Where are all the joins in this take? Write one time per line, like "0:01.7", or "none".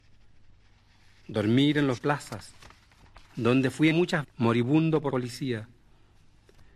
0:02.0
0:03.2
0:03.9
0:04.2
0:05.1